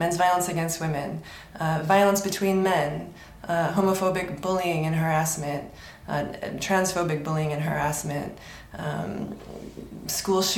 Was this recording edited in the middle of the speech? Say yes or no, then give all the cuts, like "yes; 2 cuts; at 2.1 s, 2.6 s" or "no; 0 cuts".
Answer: no; 0 cuts